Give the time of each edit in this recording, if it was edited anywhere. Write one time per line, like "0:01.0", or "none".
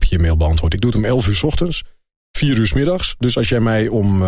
none